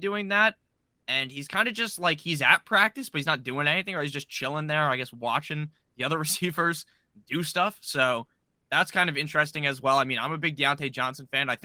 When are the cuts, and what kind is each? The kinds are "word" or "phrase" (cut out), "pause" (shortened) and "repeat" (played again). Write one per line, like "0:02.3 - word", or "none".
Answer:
none